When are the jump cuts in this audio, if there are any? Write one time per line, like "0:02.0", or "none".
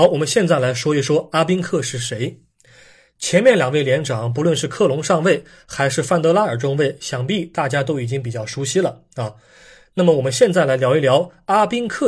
none